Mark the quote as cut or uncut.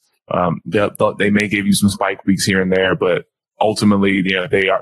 uncut